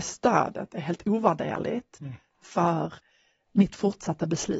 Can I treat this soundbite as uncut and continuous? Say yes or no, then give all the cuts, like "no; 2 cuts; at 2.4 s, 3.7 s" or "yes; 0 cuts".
yes; 0 cuts